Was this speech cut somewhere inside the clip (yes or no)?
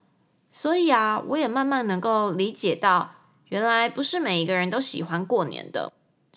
no